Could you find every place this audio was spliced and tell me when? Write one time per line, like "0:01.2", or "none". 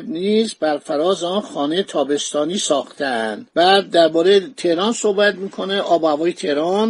0:03.5